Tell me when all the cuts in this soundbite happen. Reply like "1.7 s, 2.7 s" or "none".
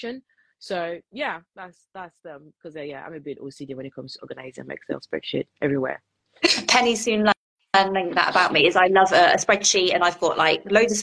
none